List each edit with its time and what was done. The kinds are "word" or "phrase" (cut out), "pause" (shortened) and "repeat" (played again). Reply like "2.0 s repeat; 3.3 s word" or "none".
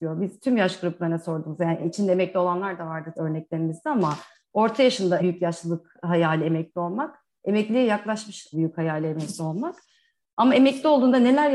3.2 s word; 5.2 s word; 8.5 s phrase